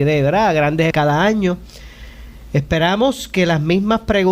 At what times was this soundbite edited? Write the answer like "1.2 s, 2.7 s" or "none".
0.9 s